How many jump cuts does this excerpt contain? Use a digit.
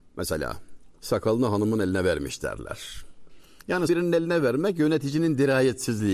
2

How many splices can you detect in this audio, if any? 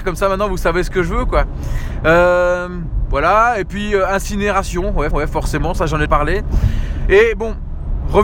2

